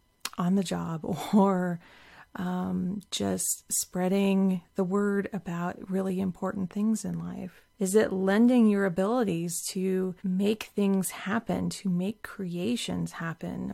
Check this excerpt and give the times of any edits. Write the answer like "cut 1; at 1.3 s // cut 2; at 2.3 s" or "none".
cut 1; at 7.7 s // cut 2; at 10.2 s